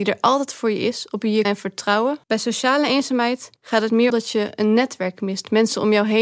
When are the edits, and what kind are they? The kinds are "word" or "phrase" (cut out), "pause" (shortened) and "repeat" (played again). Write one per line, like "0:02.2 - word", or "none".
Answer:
0:01.4 - phrase
0:02.2 - pause
0:03.6 - pause
0:04.1 - phrase

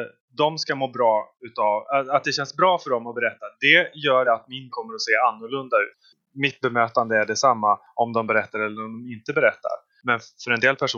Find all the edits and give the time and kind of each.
0:04.2 - word
0:04.7 - word

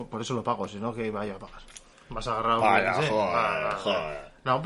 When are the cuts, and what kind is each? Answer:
0:01.9 - pause

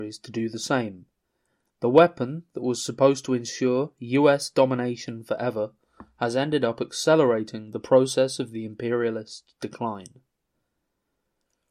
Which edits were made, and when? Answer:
none

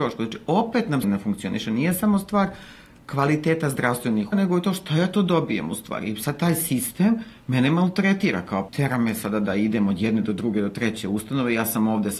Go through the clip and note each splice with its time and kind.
0:01.0 - word
0:04.3 - word
0:08.7 - word

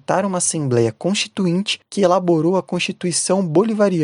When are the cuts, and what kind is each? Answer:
none

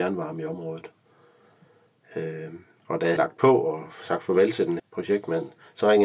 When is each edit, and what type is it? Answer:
0:03.2 - word
0:04.8 - word

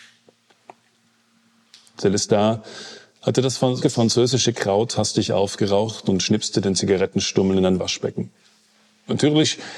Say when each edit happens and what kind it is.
0:03.8 - word

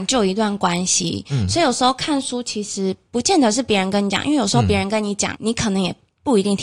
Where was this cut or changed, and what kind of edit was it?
0:05.3 - word

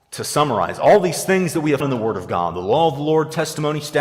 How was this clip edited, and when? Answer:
0:01.8 - word

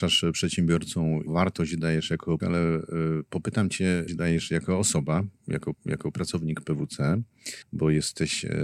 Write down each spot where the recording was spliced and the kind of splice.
0:01.3 - word
0:02.4 - word
0:04.1 - phrase
0:05.7 - repeat
0:07.6 - pause

